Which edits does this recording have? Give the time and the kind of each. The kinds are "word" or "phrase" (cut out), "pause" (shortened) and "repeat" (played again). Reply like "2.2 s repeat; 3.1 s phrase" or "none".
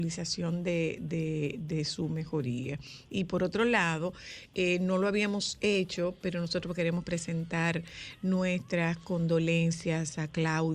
none